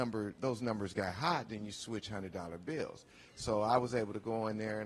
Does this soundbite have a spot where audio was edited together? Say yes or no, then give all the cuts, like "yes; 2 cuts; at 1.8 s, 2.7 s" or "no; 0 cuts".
no; 0 cuts